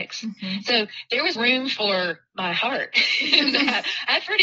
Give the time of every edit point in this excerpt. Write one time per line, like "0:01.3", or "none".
0:01.4